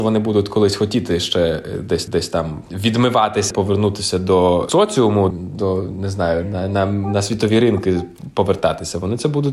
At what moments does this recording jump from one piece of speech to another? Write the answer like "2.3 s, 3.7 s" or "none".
2.1 s, 3.5 s, 5.3 s